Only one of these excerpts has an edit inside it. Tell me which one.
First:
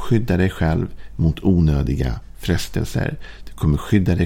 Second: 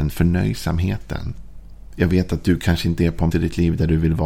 second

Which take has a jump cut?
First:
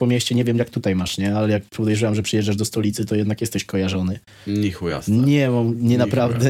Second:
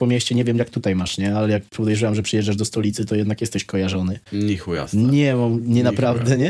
second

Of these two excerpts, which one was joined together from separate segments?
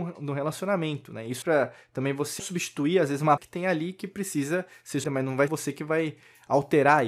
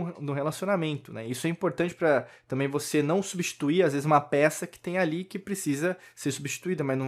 first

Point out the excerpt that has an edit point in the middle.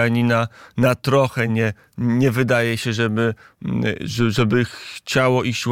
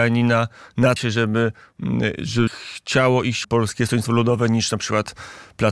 second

